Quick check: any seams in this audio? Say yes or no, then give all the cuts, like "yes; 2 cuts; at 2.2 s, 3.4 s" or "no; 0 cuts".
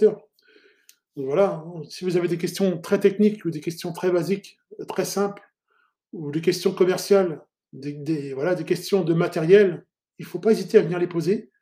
no; 0 cuts